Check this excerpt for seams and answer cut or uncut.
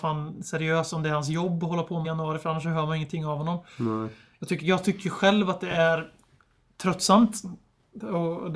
cut